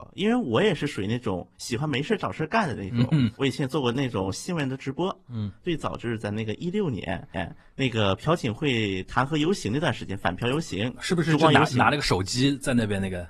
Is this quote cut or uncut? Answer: cut